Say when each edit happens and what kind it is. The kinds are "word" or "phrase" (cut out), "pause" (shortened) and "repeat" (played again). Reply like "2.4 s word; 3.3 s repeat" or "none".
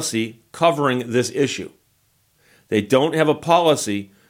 none